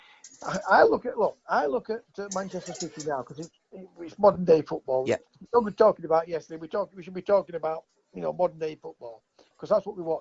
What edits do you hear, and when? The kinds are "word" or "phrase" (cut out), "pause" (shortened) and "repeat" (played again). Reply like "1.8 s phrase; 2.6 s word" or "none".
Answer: none